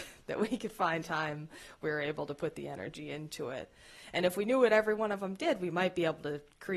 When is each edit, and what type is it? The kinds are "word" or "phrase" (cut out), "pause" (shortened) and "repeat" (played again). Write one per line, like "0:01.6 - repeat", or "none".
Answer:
0:01.0 - word